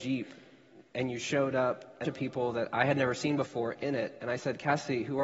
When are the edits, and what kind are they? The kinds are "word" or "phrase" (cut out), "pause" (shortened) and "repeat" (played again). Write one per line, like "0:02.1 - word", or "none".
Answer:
0:02.0 - phrase